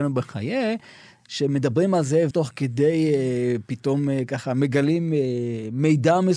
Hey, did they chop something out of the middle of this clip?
yes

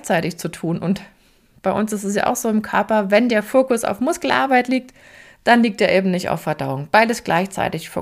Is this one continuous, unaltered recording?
yes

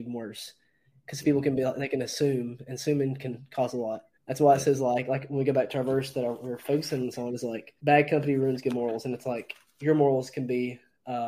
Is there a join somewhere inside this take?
yes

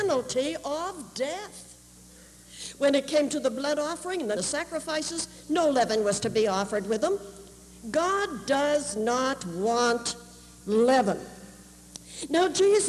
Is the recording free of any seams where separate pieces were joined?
no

